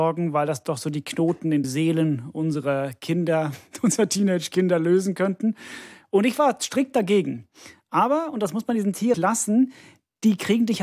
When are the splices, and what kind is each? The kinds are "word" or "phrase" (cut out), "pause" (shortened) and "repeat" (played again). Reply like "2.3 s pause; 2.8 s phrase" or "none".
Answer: 1.6 s word; 9.1 s word